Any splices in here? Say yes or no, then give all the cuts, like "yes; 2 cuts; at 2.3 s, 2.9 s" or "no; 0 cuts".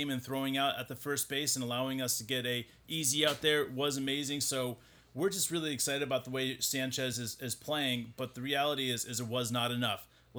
no; 0 cuts